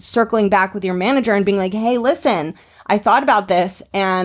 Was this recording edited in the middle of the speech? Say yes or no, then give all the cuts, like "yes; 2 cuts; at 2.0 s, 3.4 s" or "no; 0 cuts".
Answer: no; 0 cuts